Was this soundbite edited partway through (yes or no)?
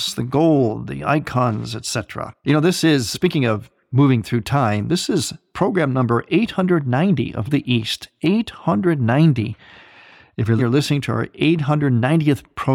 yes